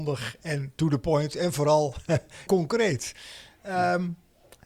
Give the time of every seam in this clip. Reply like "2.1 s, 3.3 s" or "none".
2.5 s